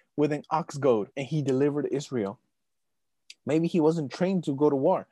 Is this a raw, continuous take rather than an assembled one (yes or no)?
no